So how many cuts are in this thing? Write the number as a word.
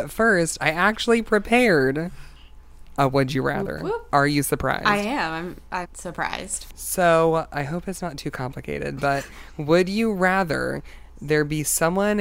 one